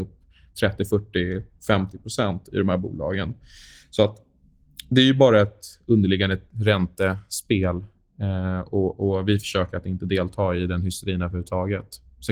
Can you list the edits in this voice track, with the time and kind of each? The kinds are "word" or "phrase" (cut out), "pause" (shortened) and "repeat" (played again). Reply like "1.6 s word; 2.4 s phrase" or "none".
none